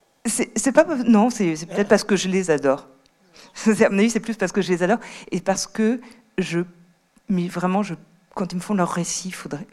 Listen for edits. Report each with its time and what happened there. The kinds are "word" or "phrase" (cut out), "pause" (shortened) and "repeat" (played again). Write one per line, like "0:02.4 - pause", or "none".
none